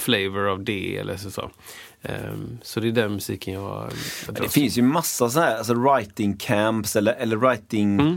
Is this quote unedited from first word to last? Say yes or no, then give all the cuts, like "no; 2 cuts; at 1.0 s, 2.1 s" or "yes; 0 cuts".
yes; 0 cuts